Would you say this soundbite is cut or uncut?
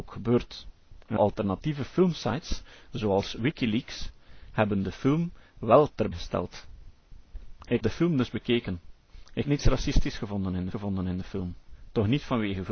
cut